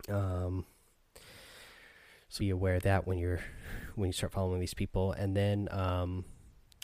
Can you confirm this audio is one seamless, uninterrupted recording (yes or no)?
no